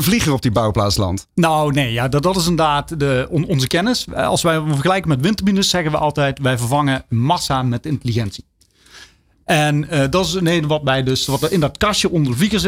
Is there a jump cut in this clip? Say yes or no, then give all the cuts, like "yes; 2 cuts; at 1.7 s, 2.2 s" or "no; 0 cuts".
no; 0 cuts